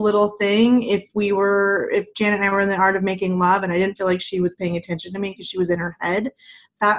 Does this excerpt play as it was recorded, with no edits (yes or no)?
yes